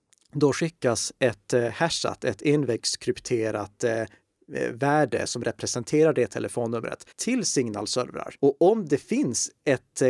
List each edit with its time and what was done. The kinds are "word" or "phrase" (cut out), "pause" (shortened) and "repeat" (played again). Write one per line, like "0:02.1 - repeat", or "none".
0:07.1 - pause
0:08.4 - pause